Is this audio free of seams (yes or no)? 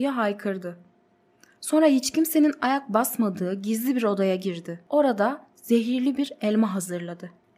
yes